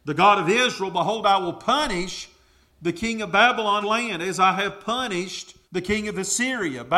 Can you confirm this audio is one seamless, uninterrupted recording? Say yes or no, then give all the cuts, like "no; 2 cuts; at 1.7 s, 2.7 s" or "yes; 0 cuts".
no; 2 cuts; at 3.8 s, 5.6 s